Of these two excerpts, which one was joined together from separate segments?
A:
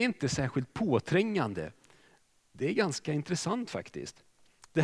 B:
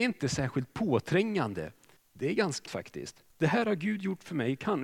B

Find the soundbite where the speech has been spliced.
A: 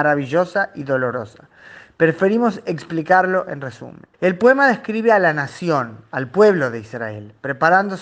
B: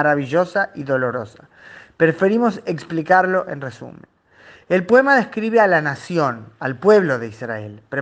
A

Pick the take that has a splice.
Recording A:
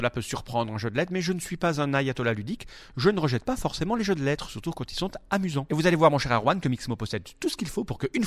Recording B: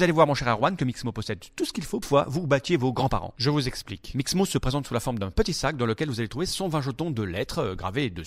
B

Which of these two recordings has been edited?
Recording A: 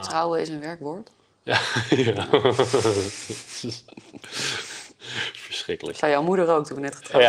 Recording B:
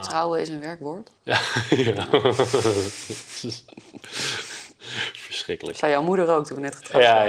B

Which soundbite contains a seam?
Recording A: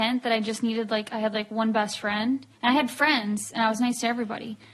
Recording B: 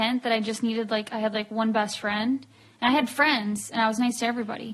A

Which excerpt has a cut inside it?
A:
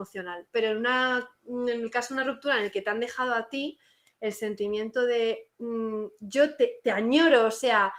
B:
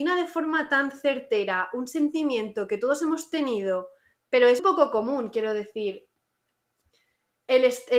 B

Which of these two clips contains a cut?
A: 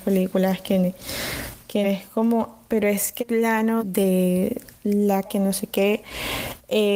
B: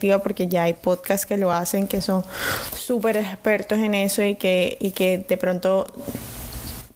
A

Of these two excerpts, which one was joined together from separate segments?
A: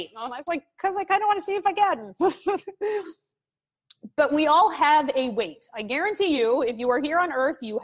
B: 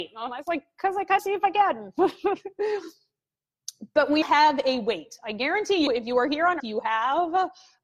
B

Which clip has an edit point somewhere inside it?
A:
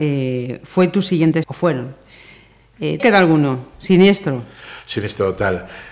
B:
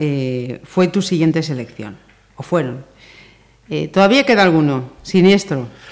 A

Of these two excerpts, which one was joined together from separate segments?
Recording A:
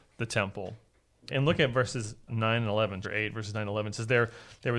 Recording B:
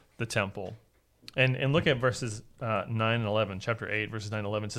A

